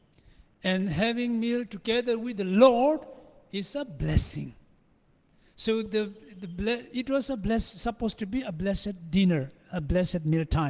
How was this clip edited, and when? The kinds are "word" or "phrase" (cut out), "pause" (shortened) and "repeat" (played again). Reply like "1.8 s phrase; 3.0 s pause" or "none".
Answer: none